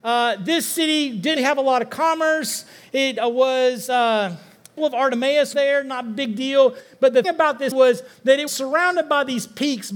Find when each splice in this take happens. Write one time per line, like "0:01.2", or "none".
0:01.4
0:04.8
0:05.5
0:07.2
0:07.7
0:08.5